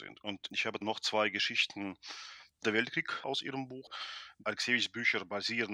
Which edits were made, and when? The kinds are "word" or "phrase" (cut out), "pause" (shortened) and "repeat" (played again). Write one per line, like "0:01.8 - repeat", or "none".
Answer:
0:02.6 - word
0:03.2 - word